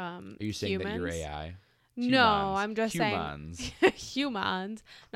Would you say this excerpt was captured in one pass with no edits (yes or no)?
yes